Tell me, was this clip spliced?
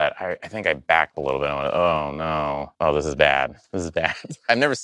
yes; 2 cuts; at 1.1 s, 2.7 s

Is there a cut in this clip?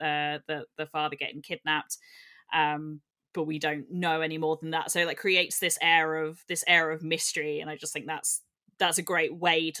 no; 0 cuts

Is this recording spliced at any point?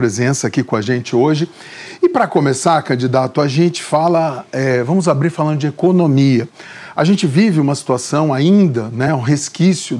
no; 0 cuts

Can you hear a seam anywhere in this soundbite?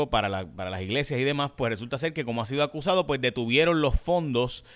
no; 0 cuts

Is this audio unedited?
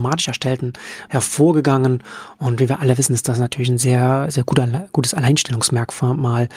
no; 1 cut; at 1.1 s

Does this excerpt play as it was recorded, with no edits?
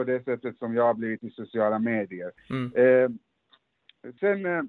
yes; 0 cuts

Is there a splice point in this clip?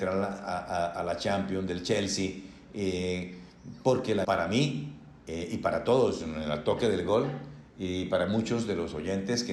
yes; 1 cut; at 4.2 s

